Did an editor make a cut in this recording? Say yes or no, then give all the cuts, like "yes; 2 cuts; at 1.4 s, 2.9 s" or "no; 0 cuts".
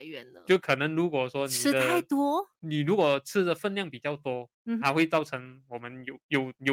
yes; 2 cuts; at 2.6 s, 4.8 s